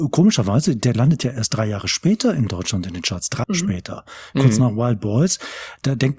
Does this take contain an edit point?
yes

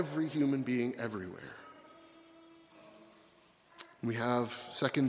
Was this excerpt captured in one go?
no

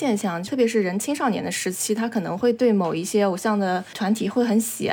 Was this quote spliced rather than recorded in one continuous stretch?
no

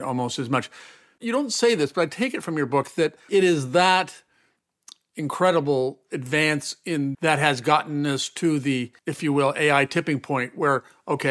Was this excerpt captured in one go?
no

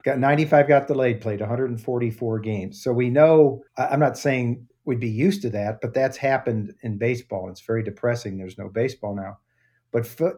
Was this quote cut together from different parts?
yes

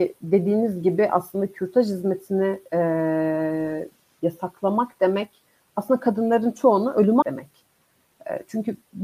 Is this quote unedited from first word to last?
no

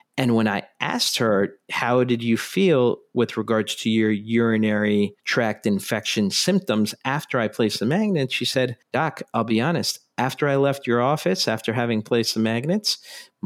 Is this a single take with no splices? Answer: no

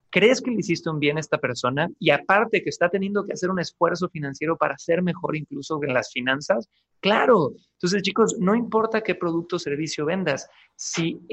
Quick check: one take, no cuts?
yes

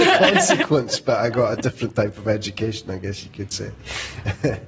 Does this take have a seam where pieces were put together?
no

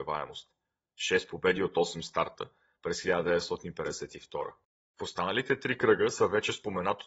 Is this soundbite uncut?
yes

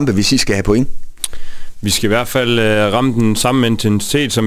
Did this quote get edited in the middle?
no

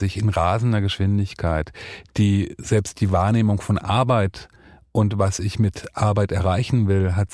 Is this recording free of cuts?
yes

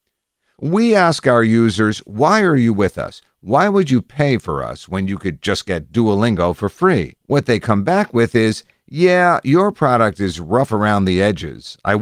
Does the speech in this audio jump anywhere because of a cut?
yes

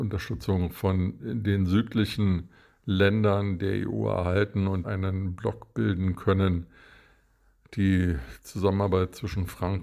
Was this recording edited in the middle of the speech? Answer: yes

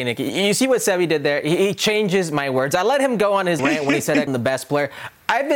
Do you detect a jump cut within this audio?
yes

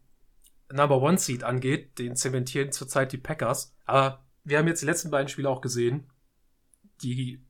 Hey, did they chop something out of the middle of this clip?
yes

